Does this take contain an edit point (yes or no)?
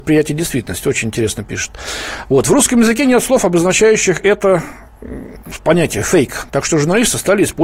no